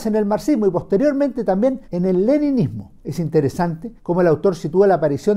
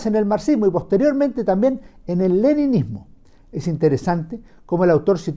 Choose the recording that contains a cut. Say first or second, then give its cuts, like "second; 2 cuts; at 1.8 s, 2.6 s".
first; 3 cuts; at 1.8 s, 3.0 s, 4.0 s